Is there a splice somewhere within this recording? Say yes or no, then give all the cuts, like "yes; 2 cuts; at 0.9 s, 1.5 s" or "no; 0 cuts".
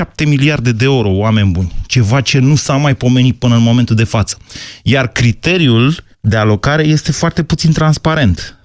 yes; 1 cut; at 6.1 s